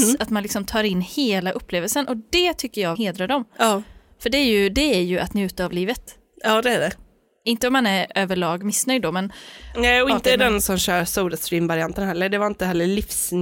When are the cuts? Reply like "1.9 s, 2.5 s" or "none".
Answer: 3.0 s